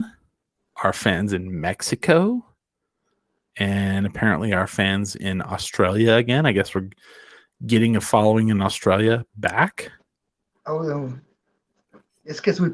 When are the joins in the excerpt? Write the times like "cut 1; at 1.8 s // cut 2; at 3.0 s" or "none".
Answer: none